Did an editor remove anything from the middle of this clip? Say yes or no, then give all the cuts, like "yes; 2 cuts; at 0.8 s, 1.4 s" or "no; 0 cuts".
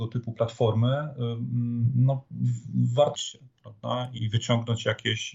yes; 2 cuts; at 3.1 s, 4.2 s